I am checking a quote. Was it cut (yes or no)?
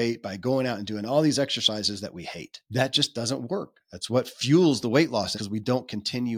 yes